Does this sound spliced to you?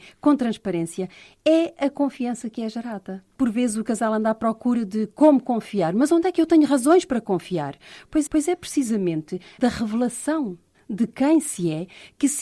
yes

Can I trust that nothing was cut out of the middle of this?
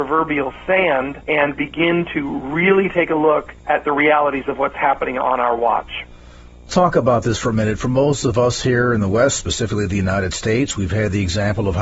no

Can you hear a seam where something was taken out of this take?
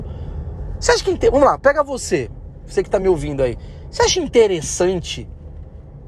no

